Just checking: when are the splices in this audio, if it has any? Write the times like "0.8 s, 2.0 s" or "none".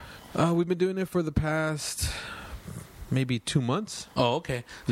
none

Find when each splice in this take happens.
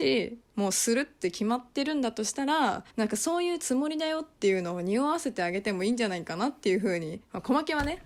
2.9 s

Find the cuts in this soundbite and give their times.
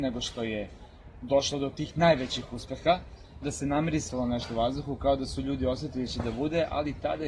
3.4 s, 6.1 s

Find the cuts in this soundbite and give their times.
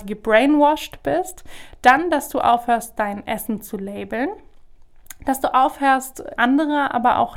6.4 s

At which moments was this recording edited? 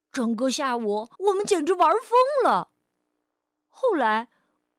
1.1 s

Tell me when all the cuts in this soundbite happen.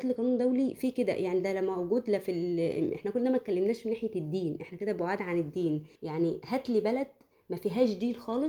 6.0 s

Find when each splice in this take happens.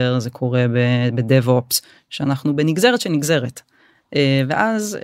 none

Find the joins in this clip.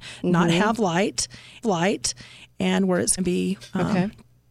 1.6 s, 3.2 s

